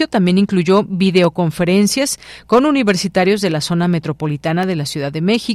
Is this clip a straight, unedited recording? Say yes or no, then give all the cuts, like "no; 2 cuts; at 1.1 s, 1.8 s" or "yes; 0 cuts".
yes; 0 cuts